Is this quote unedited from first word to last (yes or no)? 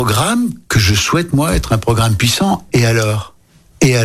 yes